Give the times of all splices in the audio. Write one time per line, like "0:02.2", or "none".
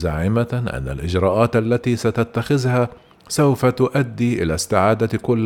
none